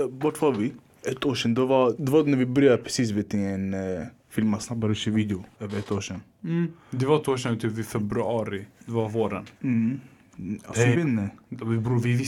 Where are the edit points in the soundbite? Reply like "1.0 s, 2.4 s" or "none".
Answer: 1.9 s, 5.5 s, 7.2 s, 8.7 s, 9.5 s, 10.9 s